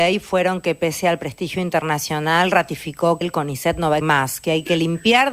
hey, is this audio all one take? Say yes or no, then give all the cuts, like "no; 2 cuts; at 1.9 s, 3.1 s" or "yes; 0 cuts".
no; 2 cuts; at 3.2 s, 4.0 s